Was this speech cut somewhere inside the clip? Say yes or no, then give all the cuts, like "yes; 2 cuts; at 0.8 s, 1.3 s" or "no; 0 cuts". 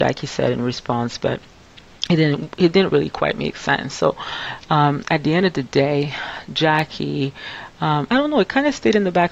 no; 0 cuts